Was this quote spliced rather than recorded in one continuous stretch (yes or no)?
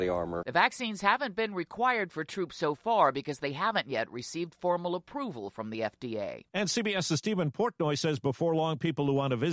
no